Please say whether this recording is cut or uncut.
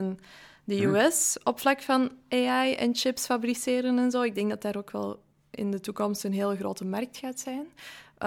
uncut